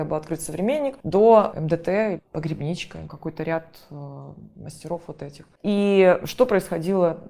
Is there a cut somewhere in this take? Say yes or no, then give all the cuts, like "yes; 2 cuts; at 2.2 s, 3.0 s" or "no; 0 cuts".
yes; 2 cuts; at 1.0 s, 5.6 s